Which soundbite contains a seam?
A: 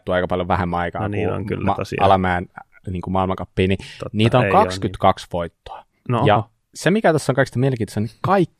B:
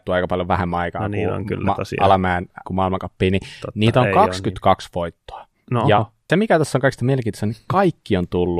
B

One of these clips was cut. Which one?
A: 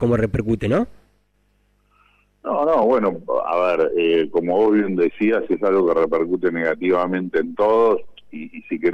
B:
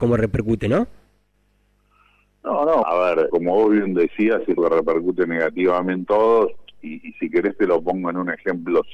B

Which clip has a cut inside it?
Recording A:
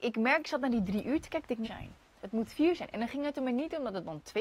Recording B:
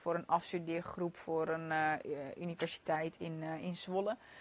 A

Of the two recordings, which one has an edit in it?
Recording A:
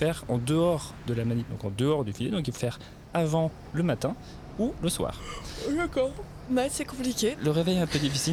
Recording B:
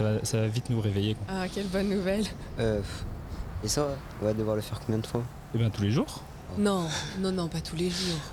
A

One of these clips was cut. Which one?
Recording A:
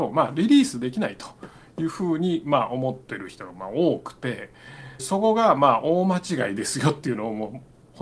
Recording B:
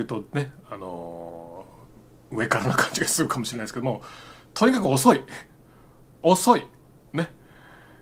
A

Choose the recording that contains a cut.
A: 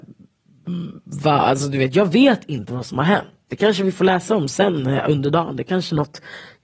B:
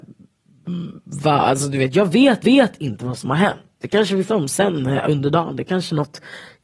B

